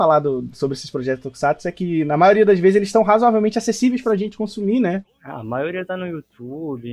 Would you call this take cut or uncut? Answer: uncut